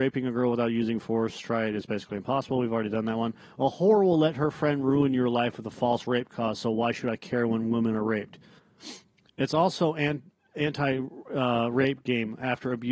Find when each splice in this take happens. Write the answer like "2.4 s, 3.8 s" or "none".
none

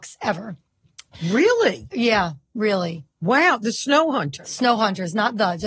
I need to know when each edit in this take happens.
none

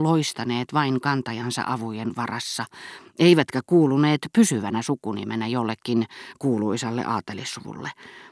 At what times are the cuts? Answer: none

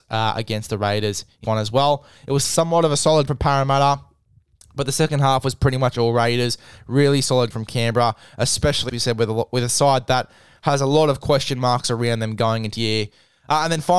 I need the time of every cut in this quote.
1.4 s, 2.4 s, 3.3 s, 7.5 s, 8.9 s, 12.8 s

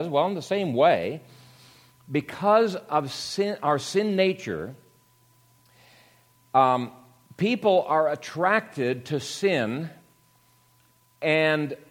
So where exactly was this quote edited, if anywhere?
none

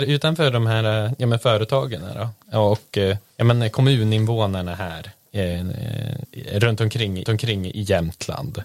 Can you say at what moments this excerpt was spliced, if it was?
3.3 s, 7.3 s

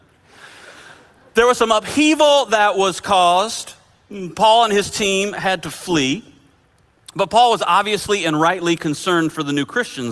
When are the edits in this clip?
none

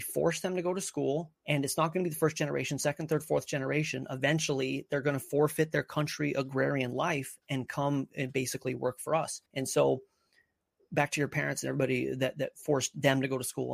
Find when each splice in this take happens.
1.4 s, 9.5 s

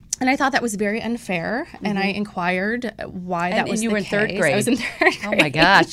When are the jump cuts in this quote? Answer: none

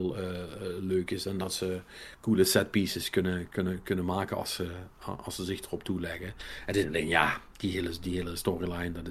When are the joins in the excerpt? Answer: none

